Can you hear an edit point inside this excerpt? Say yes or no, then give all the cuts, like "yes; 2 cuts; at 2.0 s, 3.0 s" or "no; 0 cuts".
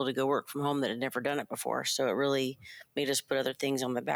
no; 0 cuts